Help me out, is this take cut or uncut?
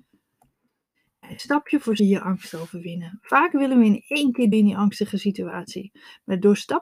cut